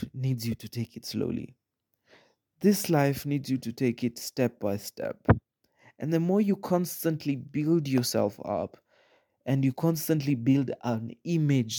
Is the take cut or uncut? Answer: uncut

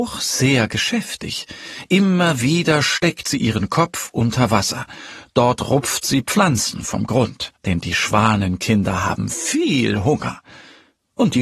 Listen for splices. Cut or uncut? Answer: cut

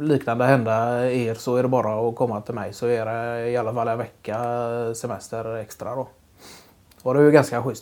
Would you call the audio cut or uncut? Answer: uncut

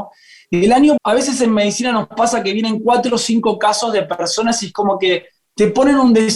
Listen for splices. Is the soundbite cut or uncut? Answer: cut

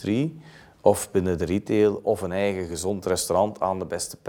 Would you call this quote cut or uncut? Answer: uncut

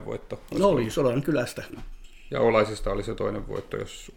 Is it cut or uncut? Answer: uncut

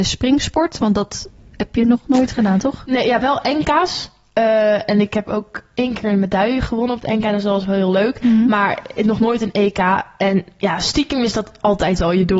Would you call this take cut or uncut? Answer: uncut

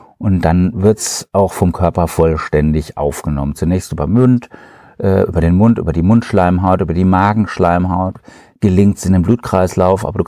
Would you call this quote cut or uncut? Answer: uncut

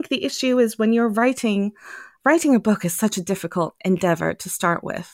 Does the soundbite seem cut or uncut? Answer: uncut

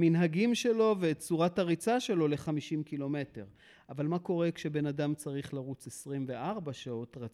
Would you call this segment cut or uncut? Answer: uncut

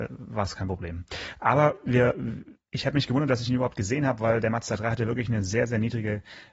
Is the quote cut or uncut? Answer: uncut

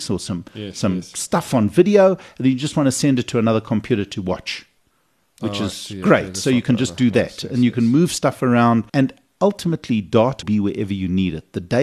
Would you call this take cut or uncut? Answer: cut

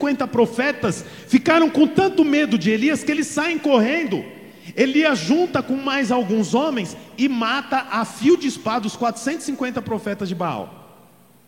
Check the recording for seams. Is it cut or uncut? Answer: uncut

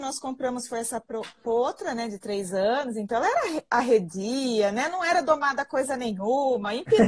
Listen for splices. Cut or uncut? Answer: uncut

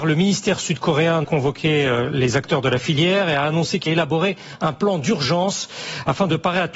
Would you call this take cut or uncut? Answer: cut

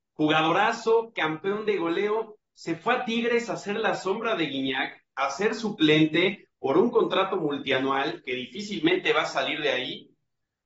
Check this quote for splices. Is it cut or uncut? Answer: uncut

